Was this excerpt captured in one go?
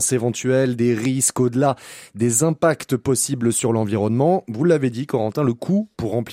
yes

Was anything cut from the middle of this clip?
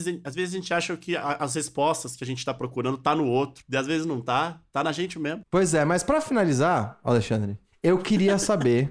no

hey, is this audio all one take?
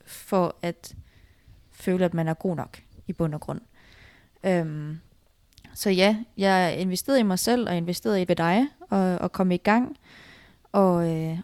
no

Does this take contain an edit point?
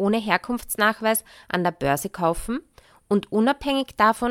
no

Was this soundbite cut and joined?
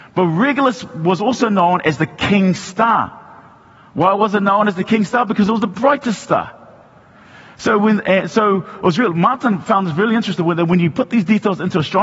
no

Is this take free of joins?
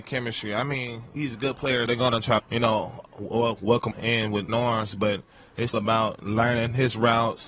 no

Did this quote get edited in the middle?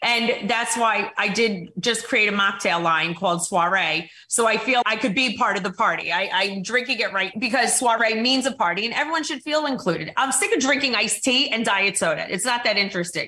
yes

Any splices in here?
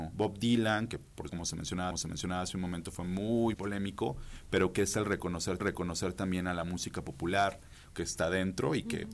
yes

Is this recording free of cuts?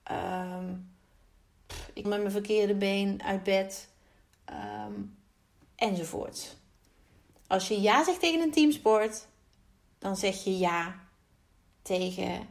no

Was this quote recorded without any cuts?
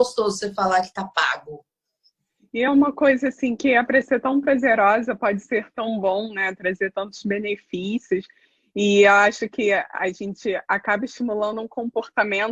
yes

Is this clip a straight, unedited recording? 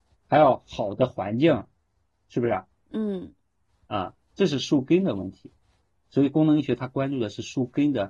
yes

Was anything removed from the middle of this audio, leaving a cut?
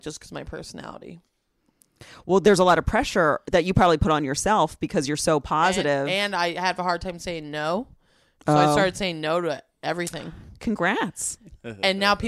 no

